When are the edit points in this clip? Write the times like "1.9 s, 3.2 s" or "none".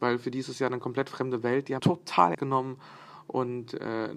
1.8 s, 2.3 s

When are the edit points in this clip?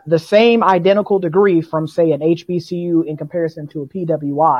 none

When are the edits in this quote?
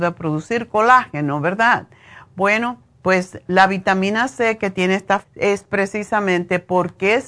5.2 s

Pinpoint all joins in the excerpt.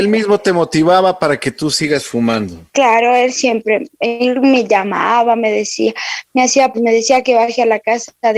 2.7 s, 6.7 s

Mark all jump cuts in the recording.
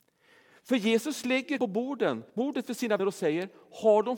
1.6 s, 2.3 s, 3.0 s

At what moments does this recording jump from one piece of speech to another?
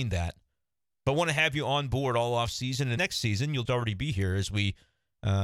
3.0 s, 3.7 s

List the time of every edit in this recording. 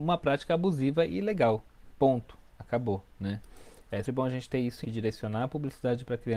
4.1 s, 4.8 s

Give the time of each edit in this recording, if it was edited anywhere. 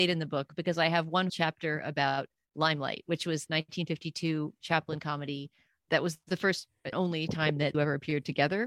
1.3 s, 3.5 s, 6.9 s, 7.7 s

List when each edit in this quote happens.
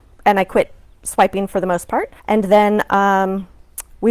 2.2 s

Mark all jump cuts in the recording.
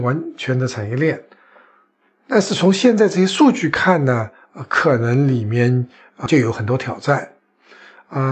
6.3 s

